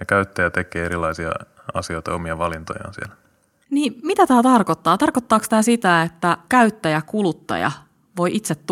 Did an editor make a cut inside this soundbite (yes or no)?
no